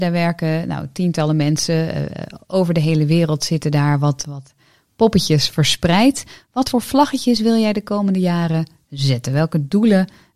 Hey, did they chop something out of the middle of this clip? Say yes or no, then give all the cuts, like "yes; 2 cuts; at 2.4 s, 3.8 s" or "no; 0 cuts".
no; 0 cuts